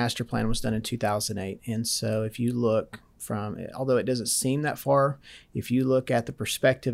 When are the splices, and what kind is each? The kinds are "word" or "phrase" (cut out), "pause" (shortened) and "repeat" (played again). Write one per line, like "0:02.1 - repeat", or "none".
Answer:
none